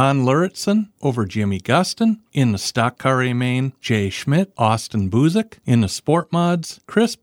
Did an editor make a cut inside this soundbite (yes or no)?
yes